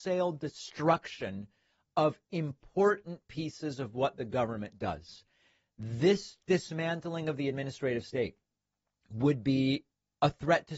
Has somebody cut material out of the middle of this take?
no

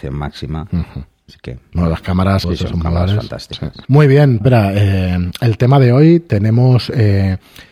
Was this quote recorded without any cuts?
no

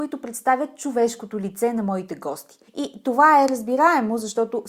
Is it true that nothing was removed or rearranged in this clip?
no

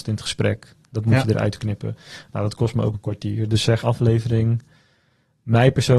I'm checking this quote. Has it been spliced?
yes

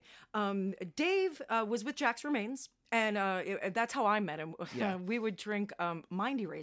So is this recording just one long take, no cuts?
yes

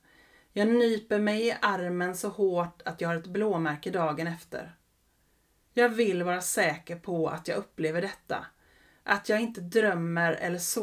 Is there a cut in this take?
no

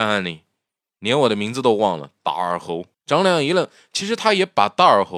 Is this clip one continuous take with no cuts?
no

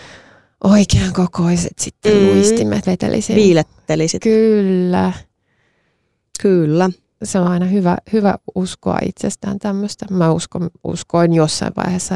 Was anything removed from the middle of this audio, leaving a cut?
yes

